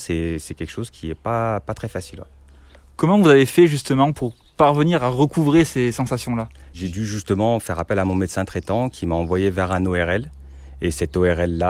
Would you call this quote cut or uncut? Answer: uncut